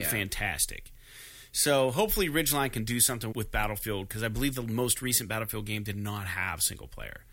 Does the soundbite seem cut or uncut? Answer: cut